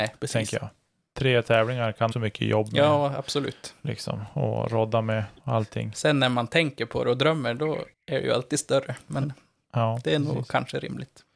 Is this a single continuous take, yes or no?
no